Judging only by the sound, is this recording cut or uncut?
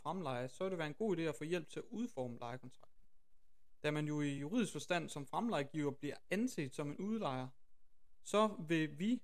uncut